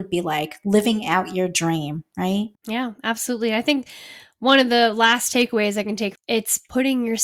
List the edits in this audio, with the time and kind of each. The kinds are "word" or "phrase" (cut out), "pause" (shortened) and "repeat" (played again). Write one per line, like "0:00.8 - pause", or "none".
0:02.5 - pause
0:06.2 - phrase